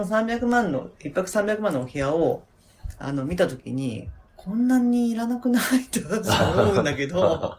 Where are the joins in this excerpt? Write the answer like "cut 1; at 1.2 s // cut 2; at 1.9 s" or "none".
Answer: cut 1; at 4.3 s